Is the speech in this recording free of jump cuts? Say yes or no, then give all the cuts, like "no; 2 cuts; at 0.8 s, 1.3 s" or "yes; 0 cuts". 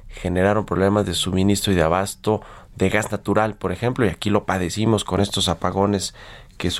yes; 0 cuts